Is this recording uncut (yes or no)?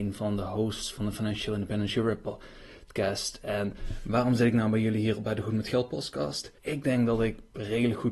no